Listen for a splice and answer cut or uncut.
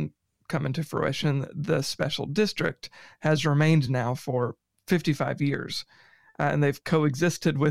uncut